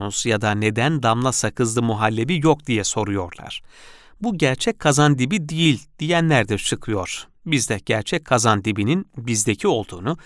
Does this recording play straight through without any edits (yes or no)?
yes